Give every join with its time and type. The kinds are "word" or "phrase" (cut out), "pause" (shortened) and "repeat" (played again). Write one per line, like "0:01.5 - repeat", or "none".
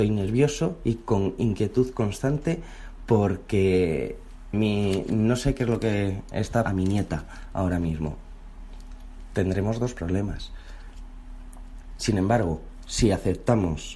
0:04.5 - word
0:06.7 - phrase